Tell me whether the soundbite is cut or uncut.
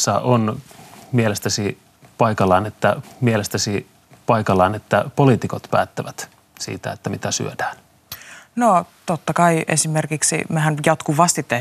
cut